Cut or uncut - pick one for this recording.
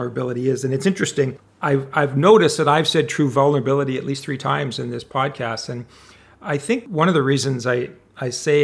uncut